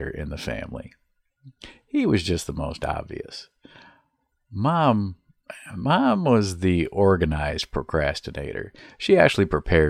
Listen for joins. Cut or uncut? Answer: uncut